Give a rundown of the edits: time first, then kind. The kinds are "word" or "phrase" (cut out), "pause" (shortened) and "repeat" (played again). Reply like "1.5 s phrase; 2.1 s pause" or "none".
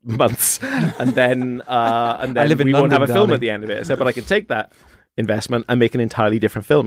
none